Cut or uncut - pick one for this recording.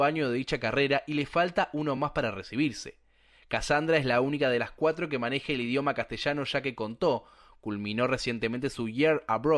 uncut